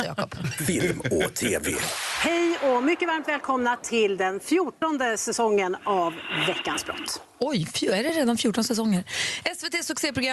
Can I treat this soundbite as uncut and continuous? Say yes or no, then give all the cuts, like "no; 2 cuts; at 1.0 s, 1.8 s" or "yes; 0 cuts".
yes; 0 cuts